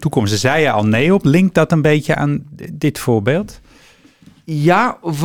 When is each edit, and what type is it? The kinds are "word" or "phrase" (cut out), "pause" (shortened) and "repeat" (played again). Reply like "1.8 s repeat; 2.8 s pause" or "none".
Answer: none